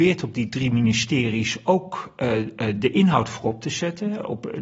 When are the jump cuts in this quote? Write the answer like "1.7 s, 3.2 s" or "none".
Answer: none